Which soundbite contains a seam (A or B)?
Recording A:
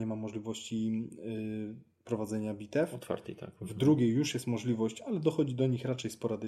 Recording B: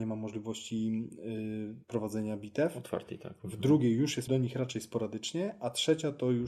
B